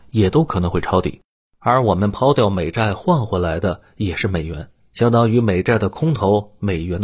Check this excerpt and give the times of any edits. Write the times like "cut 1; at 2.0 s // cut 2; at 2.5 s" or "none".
none